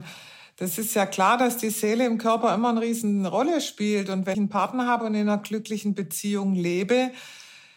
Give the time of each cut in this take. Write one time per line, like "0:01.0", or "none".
0:04.3